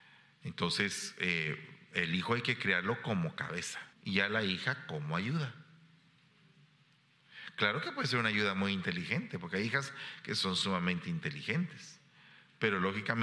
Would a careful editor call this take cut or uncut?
cut